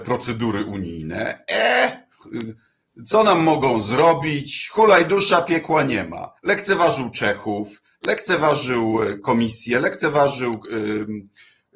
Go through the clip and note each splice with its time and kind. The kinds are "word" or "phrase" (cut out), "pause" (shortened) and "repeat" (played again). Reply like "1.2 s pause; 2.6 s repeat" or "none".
6.4 s pause